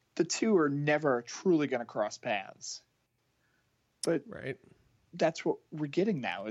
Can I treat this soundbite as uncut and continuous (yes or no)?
yes